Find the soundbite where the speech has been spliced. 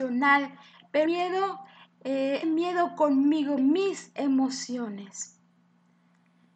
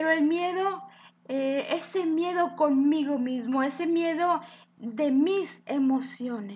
first; 3 cuts; at 1.1 s, 2.4 s, 3.6 s

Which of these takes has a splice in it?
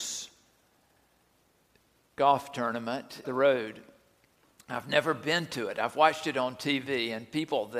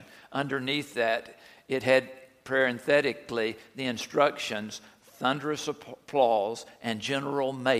first; 1 cut; at 3.2 s

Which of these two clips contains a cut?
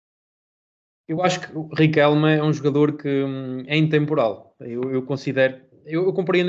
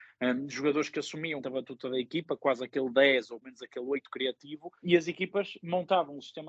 second; 3 cuts; at 1.4 s, 3.4 s, 4.8 s

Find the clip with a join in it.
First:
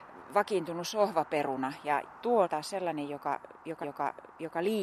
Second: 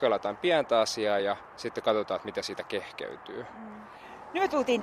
first; 3 cuts; at 2.0 s, 2.4 s, 3.8 s

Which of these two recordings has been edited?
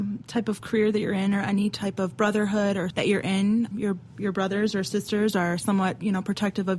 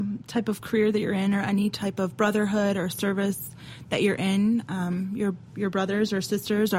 first; 2 cuts; at 2.9 s, 3.7 s

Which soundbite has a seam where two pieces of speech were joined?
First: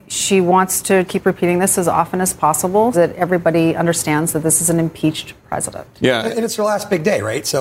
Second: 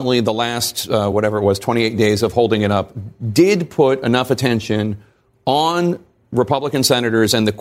first; 2 cuts; at 1.1 s, 2.9 s

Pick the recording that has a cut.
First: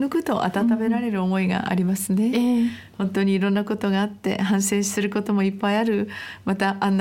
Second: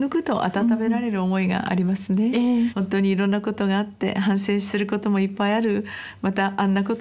second; 1 cut; at 2.7 s

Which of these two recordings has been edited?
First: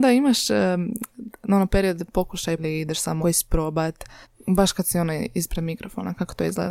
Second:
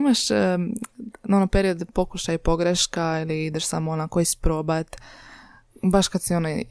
first; 3 cuts; at 2.6 s, 3.2 s, 4.2 s

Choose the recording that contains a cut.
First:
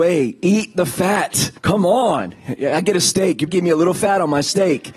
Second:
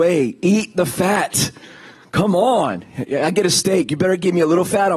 first; 2 cuts; at 1.6 s, 3.5 s

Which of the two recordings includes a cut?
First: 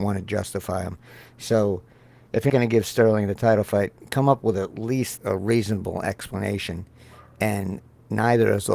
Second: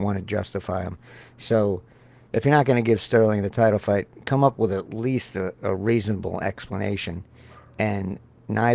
first; 2 cuts; at 2.5 s, 5.2 s

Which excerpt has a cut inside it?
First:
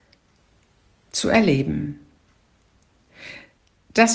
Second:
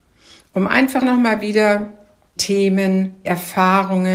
second; 3 cuts; at 1.0 s, 2.4 s, 3.3 s

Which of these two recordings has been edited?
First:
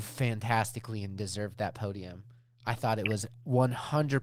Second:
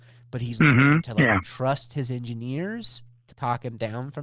second; 1 cut; at 3.3 s

